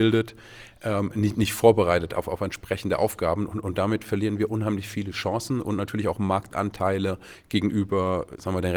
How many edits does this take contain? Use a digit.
0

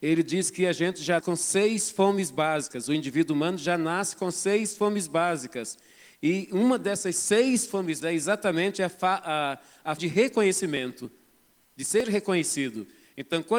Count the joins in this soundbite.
3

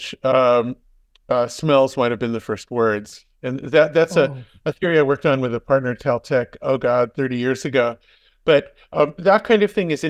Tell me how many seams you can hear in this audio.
0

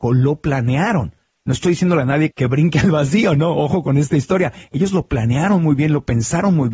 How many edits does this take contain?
1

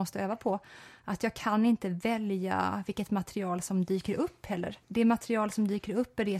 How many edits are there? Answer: 1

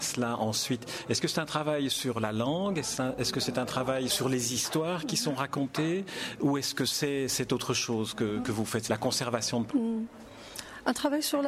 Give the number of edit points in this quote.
4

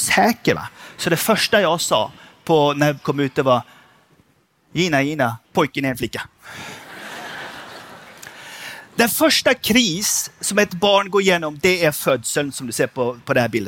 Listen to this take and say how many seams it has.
2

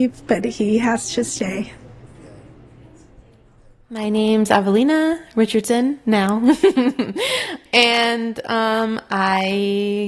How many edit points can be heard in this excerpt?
0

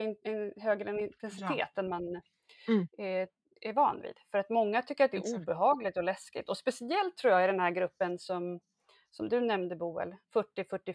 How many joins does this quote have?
0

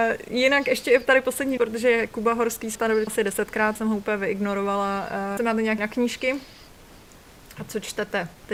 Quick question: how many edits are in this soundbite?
6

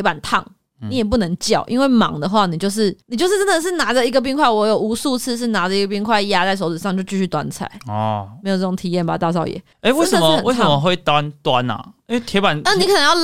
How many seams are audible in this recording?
2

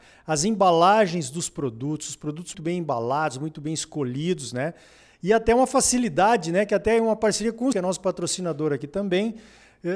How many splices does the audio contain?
2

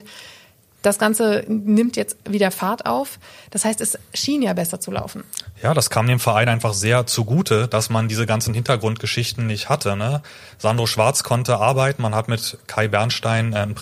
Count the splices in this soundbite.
0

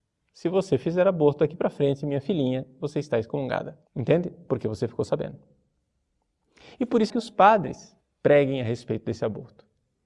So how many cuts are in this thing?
3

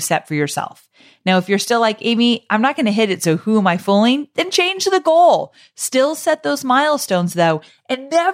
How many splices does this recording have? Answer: 0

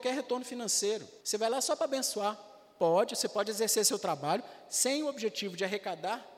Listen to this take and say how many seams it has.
1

